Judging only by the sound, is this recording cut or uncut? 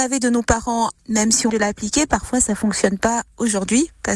cut